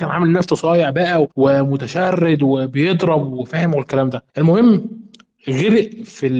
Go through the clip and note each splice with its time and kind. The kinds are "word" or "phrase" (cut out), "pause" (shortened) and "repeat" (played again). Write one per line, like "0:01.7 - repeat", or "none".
0:01.3 - pause
0:04.3 - pause